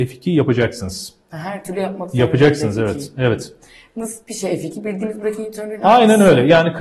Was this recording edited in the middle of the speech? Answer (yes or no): no